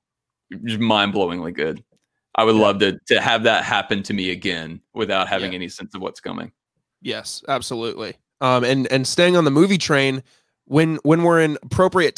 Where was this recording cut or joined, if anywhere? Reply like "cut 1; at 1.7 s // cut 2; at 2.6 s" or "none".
none